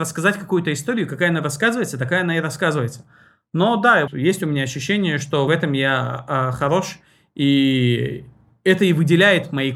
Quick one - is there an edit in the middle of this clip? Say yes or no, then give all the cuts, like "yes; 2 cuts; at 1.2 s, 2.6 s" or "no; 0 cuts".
yes; 2 cuts; at 4.1 s, 5.5 s